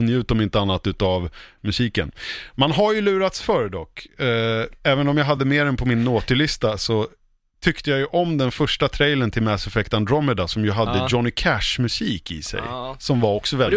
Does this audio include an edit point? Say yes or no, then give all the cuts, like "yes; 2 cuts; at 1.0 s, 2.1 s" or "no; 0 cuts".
no; 0 cuts